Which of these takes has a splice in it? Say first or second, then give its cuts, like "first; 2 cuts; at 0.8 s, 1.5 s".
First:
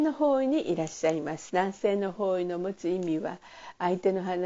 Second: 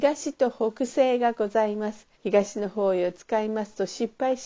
second; 1 cut; at 2.1 s